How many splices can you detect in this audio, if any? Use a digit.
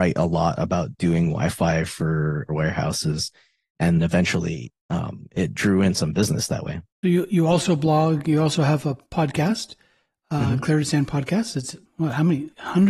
5